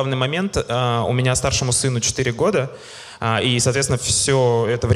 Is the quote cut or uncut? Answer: uncut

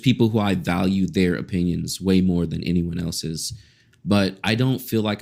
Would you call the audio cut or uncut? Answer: uncut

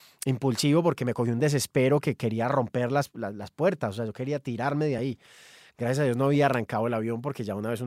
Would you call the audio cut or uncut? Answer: uncut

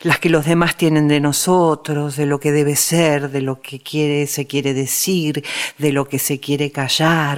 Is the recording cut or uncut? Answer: uncut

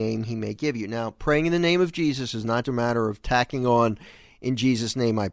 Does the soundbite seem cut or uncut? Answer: cut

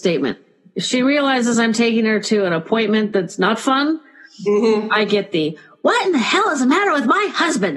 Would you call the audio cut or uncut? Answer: uncut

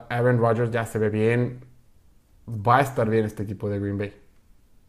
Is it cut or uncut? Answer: uncut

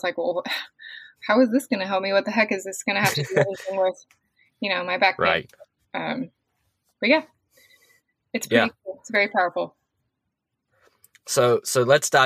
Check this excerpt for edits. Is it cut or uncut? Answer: uncut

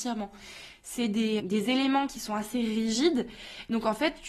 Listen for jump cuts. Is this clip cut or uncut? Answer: cut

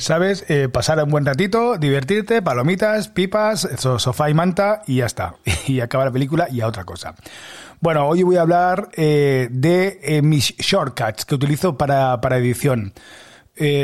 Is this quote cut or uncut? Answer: uncut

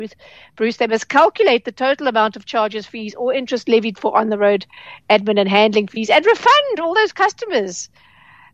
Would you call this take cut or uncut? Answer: uncut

